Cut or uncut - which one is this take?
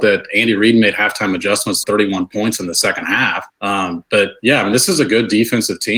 cut